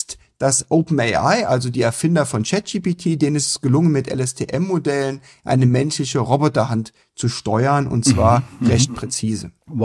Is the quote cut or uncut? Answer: uncut